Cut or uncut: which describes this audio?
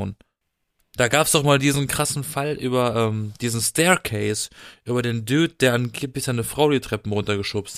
uncut